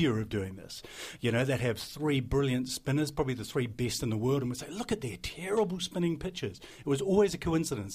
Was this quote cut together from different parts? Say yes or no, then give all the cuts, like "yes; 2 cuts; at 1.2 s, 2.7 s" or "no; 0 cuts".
no; 0 cuts